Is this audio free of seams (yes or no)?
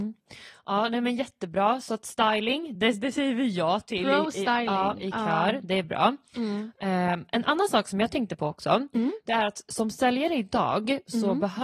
yes